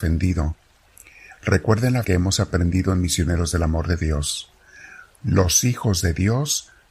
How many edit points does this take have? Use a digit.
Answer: 1